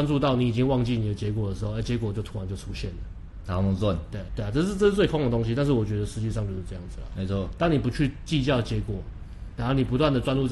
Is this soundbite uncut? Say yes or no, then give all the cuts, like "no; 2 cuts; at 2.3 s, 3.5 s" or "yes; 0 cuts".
no; 1 cut; at 4.3 s